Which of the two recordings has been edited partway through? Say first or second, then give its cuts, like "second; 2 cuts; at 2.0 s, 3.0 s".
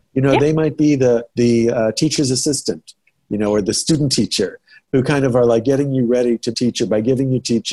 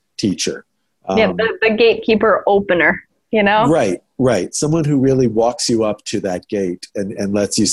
first; 2 cuts; at 1.3 s, 6.5 s